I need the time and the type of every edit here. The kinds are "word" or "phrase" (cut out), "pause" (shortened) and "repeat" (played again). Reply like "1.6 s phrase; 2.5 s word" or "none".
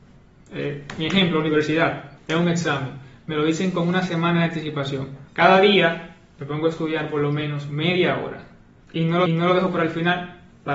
2.2 s pause; 5.3 s pause; 9.3 s repeat